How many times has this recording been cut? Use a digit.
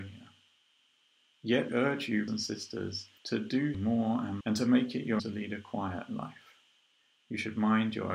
6